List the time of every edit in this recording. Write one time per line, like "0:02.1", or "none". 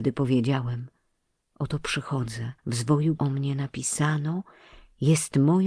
0:02.6
0:03.2